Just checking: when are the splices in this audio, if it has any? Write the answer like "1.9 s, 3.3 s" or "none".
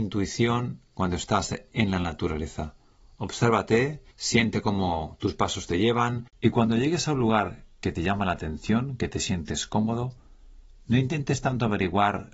4.1 s, 6.3 s